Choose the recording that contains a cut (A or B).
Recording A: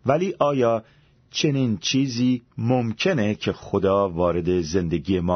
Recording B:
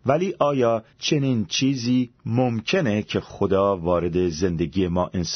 B